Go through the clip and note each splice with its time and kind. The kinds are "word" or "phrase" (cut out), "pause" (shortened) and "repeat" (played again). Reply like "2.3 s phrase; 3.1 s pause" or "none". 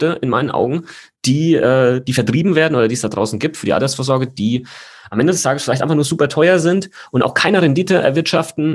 none